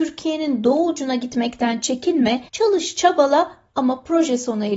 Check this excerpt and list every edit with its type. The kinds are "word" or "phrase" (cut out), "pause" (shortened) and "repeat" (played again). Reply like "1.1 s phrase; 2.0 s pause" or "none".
2.5 s pause